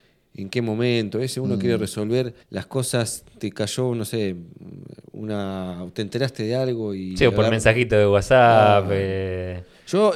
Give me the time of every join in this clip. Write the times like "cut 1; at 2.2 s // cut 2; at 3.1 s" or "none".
cut 1; at 2.4 s

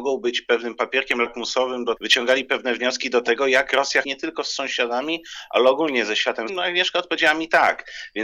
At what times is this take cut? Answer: cut 1; at 2.0 s // cut 2; at 4.0 s // cut 3; at 6.5 s

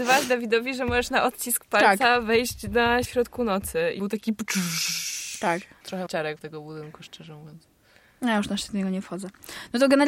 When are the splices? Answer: cut 1; at 3.0 s // cut 2; at 4.0 s // cut 3; at 6.1 s // cut 4; at 6.4 s

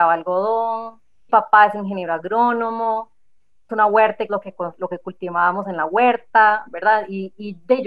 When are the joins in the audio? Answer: cut 1; at 1.3 s // cut 2; at 3.7 s // cut 3; at 4.3 s

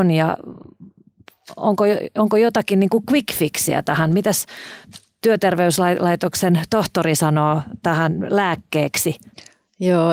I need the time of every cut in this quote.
none

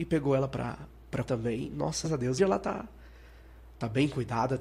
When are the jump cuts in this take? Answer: cut 1; at 1.3 s // cut 2; at 2.0 s // cut 3; at 2.4 s

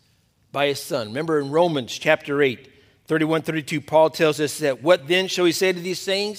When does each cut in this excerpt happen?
none

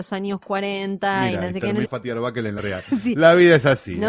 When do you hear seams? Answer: cut 1; at 1.8 s // cut 2; at 2.6 s

